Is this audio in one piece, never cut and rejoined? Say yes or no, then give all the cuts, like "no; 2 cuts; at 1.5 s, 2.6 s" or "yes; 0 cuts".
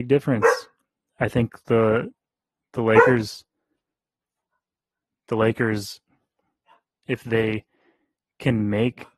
yes; 0 cuts